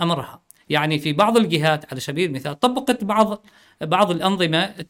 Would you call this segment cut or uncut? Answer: uncut